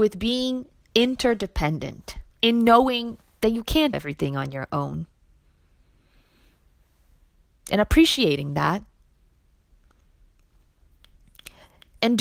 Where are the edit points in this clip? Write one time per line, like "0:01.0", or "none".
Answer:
0:02.3
0:03.9